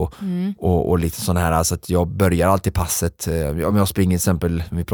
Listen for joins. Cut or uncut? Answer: uncut